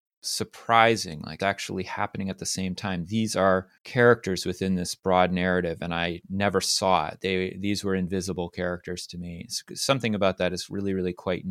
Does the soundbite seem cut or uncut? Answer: cut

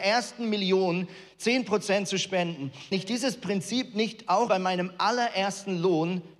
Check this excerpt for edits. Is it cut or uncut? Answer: cut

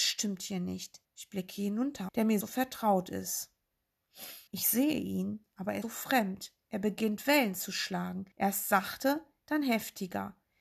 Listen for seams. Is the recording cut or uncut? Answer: cut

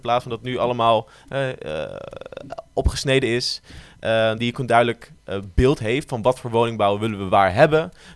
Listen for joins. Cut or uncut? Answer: uncut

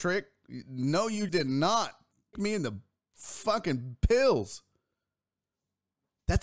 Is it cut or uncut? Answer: cut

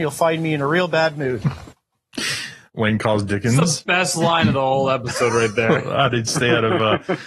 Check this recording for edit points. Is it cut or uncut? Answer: uncut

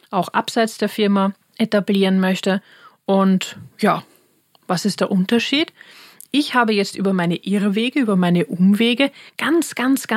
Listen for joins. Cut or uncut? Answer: uncut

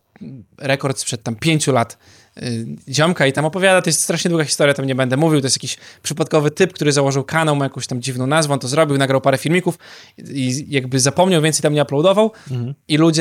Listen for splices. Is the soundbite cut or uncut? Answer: uncut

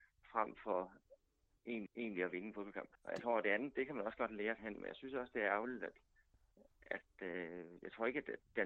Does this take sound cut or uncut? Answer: cut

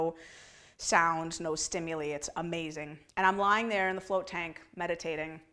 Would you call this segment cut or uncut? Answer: cut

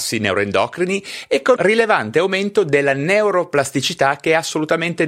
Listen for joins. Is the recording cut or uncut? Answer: cut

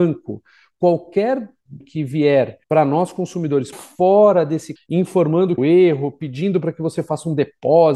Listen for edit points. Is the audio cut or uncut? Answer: cut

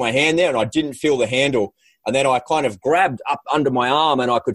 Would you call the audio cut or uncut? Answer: uncut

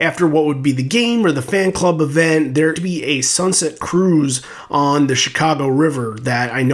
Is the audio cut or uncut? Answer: cut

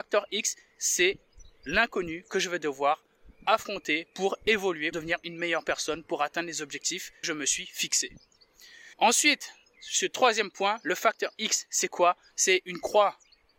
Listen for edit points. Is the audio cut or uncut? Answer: cut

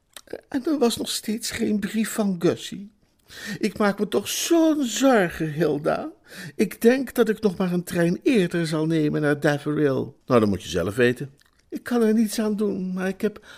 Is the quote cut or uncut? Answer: cut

